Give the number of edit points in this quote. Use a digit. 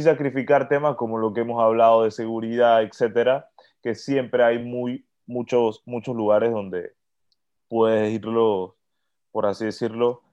0